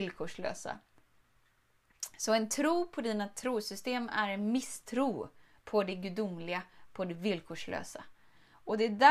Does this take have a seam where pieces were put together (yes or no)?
no